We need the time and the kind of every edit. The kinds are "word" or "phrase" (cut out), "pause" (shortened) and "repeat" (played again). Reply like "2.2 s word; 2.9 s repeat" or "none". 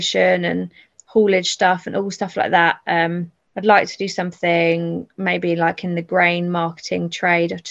3.4 s pause